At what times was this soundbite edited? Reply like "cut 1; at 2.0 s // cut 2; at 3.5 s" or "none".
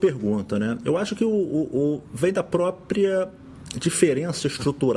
none